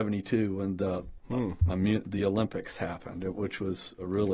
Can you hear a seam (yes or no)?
no